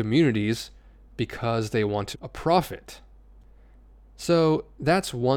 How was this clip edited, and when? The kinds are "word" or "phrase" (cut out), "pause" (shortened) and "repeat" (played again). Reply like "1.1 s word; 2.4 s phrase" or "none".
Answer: 2.1 s word